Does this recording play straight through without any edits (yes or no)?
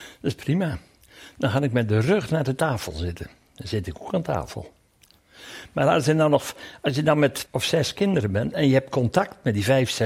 no